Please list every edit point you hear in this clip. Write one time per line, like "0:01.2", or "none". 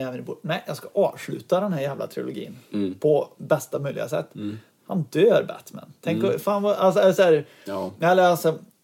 none